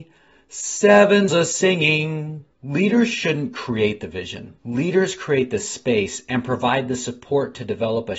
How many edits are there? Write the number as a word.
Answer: three